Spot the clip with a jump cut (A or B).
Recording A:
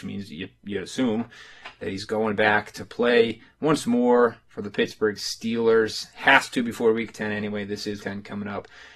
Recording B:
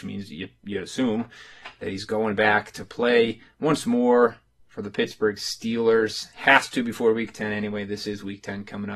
A